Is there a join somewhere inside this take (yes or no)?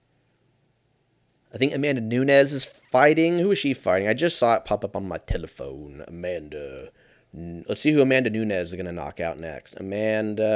no